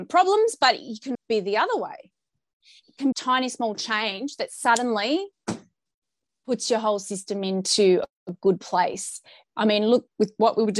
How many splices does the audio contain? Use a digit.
2